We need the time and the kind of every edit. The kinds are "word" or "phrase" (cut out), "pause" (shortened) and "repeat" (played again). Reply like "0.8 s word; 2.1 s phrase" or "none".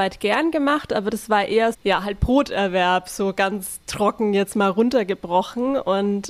1.7 s word